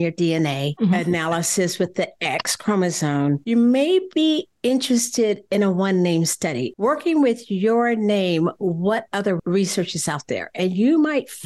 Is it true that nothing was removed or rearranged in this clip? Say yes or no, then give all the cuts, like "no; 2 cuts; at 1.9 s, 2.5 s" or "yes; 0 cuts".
yes; 0 cuts